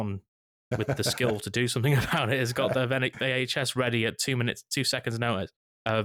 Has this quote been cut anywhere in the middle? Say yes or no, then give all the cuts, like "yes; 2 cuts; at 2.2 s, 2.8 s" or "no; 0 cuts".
no; 0 cuts